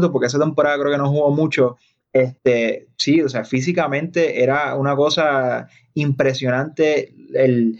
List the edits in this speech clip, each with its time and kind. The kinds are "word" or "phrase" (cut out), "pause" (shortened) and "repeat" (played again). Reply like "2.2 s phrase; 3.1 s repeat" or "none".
none